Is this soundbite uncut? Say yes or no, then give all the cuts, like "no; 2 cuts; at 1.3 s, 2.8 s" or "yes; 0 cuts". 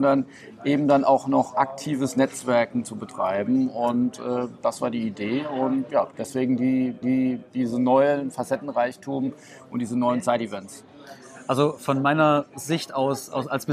no; 2 cuts; at 5.9 s, 7.0 s